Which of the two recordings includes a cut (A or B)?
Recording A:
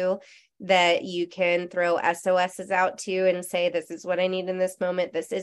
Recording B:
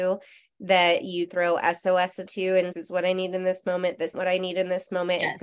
B